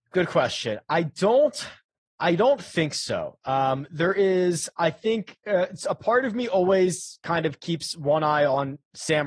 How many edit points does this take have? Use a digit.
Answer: 0